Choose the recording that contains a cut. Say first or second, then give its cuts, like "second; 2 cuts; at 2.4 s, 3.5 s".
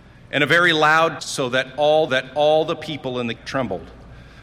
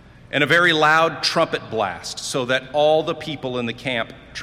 first; 3 cuts; at 1.2 s, 2.1 s, 3.4 s